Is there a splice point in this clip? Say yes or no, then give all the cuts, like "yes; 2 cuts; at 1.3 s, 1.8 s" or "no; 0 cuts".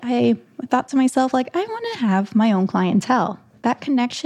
no; 0 cuts